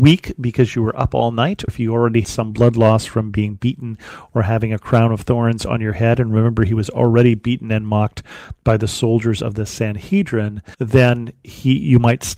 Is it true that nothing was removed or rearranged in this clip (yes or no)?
no